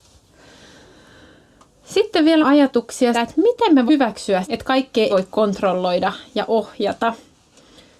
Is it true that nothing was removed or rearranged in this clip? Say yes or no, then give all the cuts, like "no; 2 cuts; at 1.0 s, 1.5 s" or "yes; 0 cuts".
no; 5 cuts; at 2.4 s, 3.1 s, 3.9 s, 4.4 s, 5.1 s